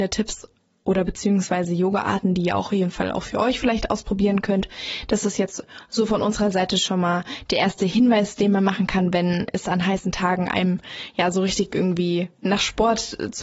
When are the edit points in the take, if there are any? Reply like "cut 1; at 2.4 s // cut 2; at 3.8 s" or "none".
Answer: none